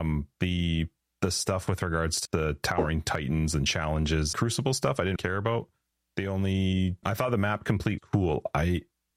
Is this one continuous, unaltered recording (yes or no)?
no